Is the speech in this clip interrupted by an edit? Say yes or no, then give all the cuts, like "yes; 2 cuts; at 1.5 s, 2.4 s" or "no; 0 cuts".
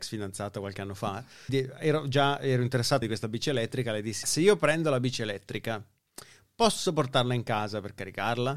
yes; 3 cuts; at 1.5 s, 3.0 s, 4.2 s